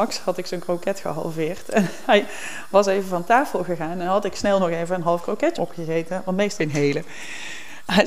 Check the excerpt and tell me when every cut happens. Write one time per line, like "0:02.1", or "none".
0:05.6
0:06.6